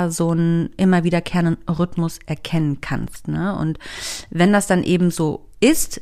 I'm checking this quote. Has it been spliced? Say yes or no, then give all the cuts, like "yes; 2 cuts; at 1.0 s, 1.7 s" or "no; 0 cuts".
no; 0 cuts